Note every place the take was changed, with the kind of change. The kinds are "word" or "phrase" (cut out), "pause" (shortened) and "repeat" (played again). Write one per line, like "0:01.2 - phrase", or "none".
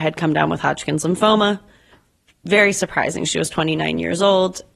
none